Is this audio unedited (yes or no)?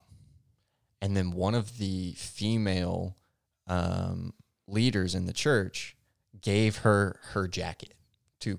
yes